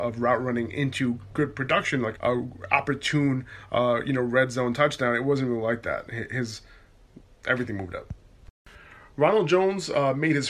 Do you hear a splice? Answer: yes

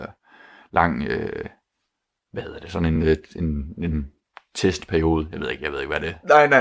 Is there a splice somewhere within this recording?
no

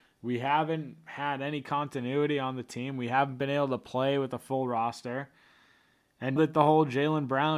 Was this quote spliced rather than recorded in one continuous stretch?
yes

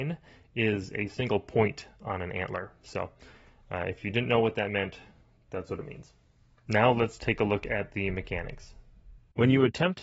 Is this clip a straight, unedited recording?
yes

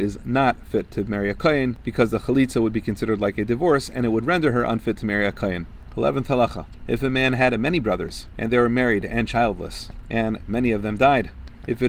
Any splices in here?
no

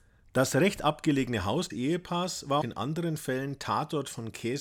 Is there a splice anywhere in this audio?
yes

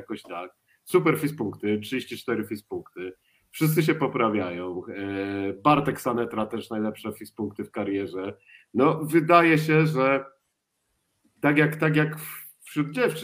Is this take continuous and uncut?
yes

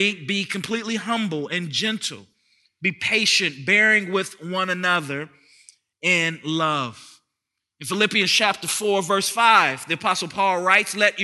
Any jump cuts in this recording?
no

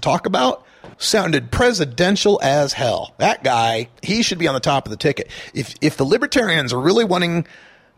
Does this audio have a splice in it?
yes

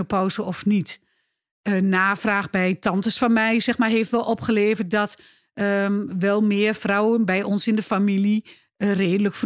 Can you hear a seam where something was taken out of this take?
no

